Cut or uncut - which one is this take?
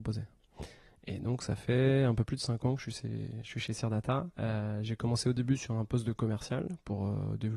cut